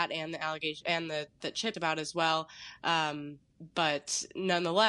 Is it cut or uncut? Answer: cut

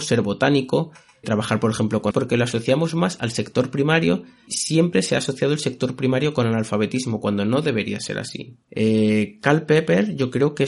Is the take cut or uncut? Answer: cut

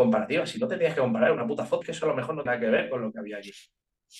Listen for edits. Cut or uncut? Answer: cut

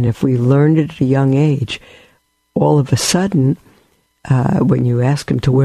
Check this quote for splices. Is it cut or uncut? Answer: uncut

